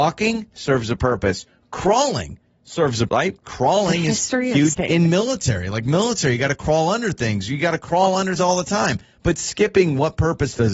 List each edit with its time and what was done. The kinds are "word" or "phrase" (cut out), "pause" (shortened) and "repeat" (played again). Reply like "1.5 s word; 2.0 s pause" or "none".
3.1 s word; 4.7 s word; 8.4 s word

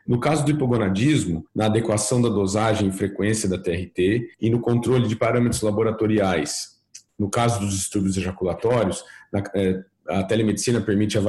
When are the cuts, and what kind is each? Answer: 1.5 s pause; 4.3 s pause

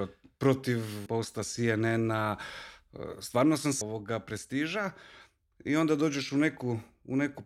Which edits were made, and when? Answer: 1.1 s phrase; 3.8 s word

